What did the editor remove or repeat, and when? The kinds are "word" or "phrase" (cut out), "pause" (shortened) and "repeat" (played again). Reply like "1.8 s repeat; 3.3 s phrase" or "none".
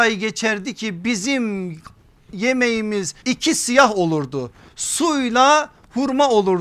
3.2 s pause

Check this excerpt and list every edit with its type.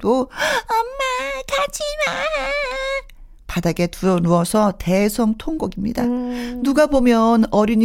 none

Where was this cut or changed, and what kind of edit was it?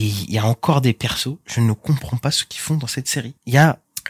none

